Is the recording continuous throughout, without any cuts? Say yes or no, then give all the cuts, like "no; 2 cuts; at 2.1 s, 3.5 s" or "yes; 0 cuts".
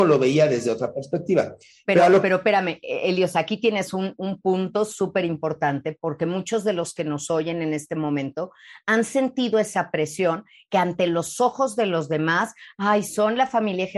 yes; 0 cuts